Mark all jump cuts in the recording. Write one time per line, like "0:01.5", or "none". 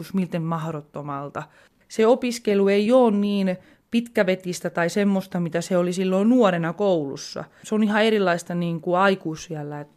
none

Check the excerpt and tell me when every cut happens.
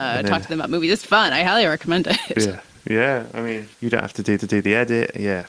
0:01.0
0:03.7
0:04.4

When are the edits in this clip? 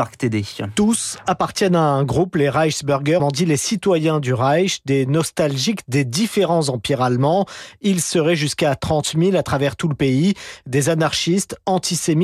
0:03.2

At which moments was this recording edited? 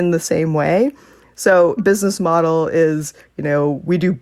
0:01.8

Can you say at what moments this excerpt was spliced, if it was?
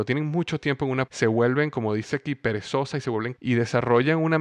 0:01.1
0:03.4

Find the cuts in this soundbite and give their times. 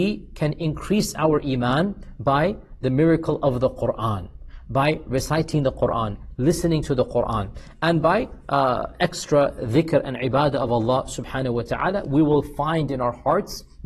none

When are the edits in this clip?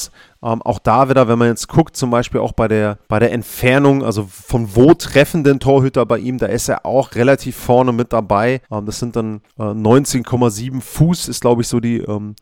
0:03.0
0:08.6
0:09.5

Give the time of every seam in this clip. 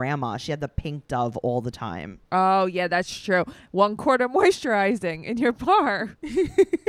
0:02.3

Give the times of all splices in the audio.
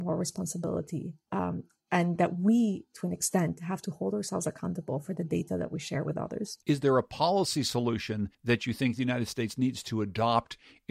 0:06.6
0:08.3

